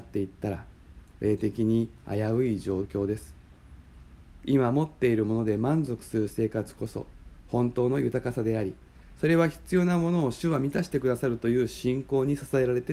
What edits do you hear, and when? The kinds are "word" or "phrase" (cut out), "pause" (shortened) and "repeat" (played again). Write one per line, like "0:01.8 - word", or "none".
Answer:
none